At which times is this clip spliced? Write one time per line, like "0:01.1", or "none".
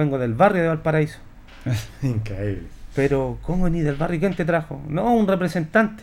none